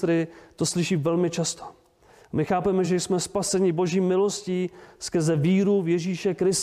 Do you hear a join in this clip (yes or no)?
no